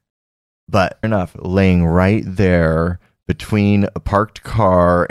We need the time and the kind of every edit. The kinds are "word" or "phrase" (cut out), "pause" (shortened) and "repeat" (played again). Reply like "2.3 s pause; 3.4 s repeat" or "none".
1.0 s word

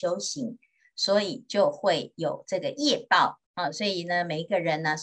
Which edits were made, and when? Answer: 3.5 s pause

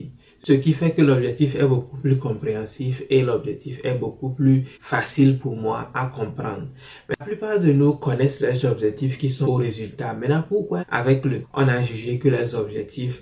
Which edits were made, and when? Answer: 4.7 s pause; 7.2 s word; 9.4 s word; 10.8 s phrase; 11.4 s word

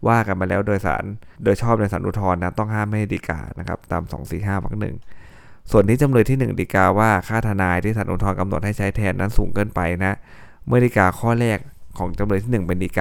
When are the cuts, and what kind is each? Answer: 1.3 s pause

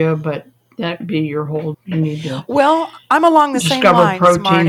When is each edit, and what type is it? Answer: 1.0 s word; 1.7 s word

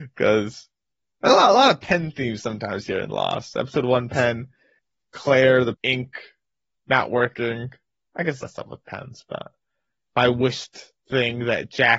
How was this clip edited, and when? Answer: 5.7 s word; 8.4 s phrase

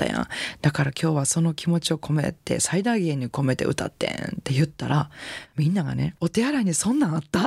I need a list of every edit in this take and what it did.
6.2 s word

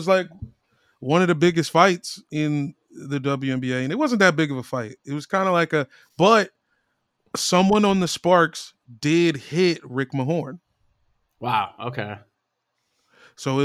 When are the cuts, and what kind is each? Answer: none

